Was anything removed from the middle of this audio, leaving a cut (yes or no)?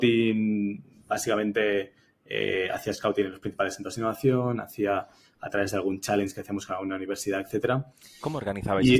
no